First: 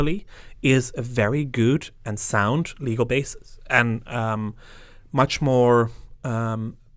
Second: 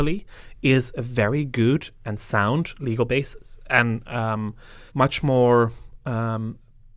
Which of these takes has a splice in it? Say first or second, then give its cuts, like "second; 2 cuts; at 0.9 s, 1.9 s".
second; 1 cut; at 4.9 s